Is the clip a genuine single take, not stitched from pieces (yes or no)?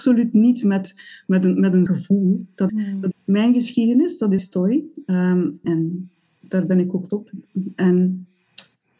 no